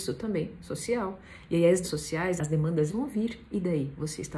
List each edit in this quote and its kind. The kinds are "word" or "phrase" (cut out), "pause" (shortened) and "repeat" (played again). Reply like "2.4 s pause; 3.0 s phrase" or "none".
1.8 s word; 2.4 s word; 2.9 s word